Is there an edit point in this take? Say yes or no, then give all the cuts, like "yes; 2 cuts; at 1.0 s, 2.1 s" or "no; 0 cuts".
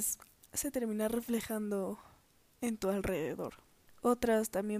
no; 0 cuts